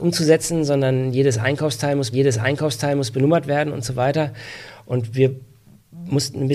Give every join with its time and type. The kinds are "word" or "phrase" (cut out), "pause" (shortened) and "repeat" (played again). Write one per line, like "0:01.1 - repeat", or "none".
0:02.1 - repeat